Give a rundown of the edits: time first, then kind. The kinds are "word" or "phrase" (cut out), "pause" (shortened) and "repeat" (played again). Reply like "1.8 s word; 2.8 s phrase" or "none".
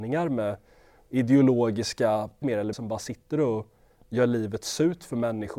2.4 s word; 2.7 s word